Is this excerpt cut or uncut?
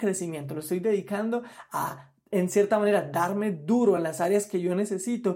uncut